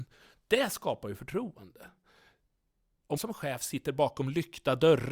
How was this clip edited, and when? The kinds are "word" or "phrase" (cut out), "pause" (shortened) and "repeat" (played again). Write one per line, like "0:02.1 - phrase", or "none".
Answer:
0:03.2 - word